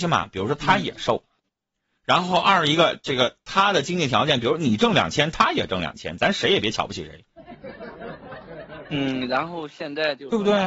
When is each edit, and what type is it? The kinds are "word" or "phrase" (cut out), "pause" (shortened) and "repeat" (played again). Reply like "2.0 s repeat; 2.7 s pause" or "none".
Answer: none

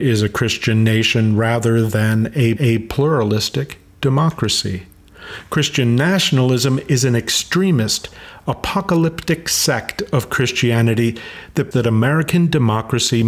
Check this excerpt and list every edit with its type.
2.6 s repeat; 11.7 s word

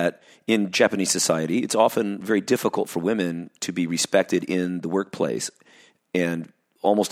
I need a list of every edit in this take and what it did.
none

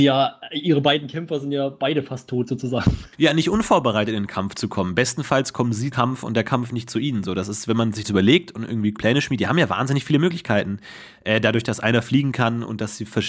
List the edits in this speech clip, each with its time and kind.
3.1 s pause; 5.9 s word; 8.0 s phrase; 8.9 s word

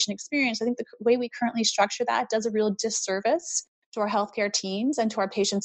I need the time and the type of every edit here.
none

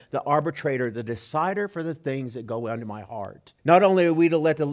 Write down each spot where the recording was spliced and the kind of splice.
3.6 s pause

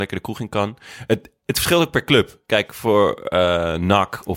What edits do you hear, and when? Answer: none

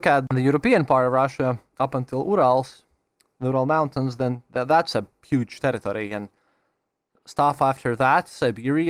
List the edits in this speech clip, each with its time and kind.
none

